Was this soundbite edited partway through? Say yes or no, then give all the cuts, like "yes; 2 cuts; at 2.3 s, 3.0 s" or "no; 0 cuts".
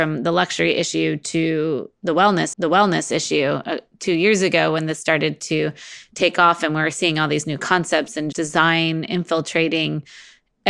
yes; 2 cuts; at 2.5 s, 8.3 s